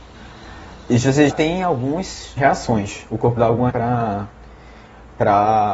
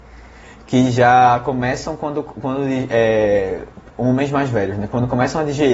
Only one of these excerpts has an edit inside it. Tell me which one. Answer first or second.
first